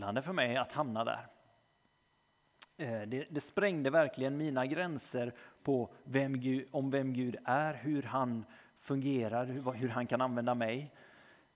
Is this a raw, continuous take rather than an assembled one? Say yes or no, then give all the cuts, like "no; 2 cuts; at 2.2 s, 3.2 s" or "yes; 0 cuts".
yes; 0 cuts